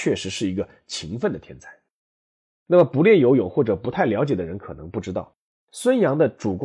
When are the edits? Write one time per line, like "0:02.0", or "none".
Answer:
none